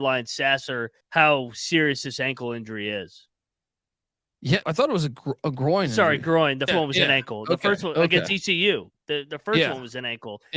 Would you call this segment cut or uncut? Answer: cut